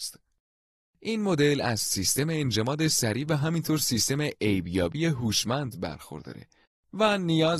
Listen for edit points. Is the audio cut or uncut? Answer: uncut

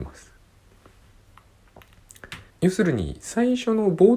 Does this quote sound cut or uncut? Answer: cut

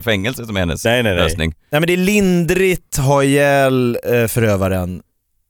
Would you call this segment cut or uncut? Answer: cut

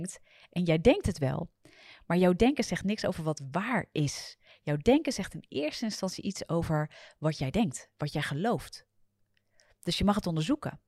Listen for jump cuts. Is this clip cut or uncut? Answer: uncut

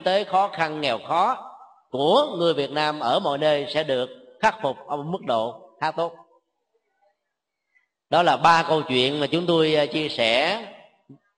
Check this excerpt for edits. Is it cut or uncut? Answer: uncut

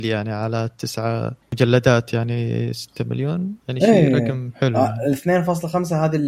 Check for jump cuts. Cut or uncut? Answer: cut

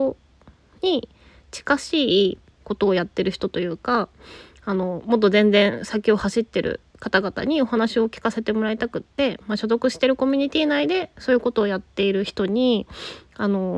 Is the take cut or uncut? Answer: uncut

